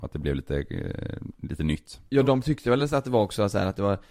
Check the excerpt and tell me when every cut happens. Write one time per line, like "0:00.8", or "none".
none